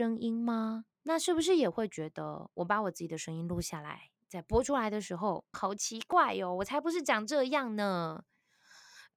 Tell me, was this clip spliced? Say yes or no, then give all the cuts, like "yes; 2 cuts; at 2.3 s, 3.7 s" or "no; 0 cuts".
yes; 2 cuts; at 0.9 s, 5.5 s